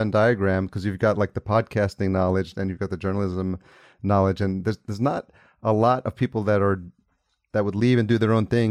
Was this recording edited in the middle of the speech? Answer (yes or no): no